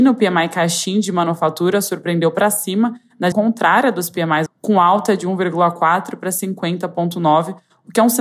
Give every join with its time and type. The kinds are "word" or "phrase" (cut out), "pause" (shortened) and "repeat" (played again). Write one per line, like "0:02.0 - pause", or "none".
0:03.3 - word
0:04.5 - word